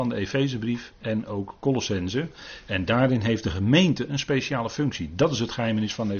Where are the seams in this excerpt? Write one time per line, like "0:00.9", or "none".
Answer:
none